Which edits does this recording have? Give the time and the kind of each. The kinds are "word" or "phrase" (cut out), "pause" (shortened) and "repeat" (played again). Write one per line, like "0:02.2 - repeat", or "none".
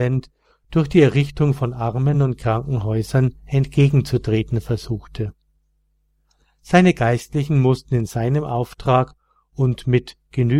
none